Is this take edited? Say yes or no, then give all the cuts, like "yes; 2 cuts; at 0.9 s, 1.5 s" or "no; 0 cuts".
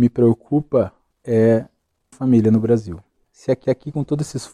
yes; 3 cuts; at 2.1 s, 3.2 s, 3.6 s